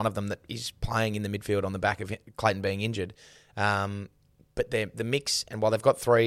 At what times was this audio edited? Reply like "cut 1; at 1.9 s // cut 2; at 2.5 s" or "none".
none